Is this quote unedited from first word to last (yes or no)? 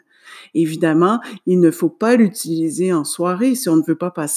yes